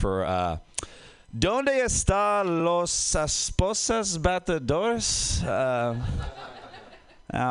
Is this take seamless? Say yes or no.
yes